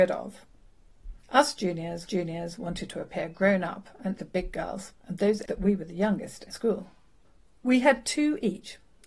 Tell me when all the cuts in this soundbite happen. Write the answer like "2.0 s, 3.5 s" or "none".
1.2 s, 2.0 s, 4.2 s, 5.0 s, 5.5 s, 6.5 s